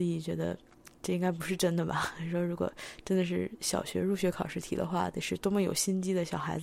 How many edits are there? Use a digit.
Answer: 1